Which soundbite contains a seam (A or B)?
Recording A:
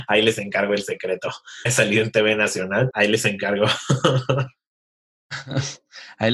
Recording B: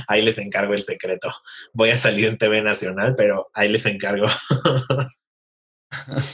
A